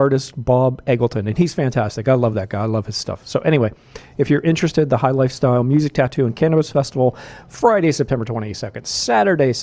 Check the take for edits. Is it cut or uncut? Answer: uncut